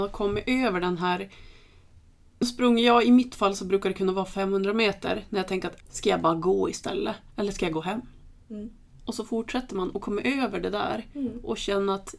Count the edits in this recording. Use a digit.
2